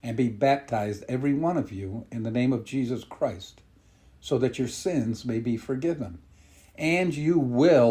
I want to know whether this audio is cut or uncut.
uncut